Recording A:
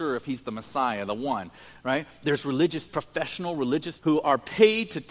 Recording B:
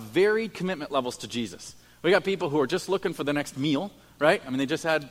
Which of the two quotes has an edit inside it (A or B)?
A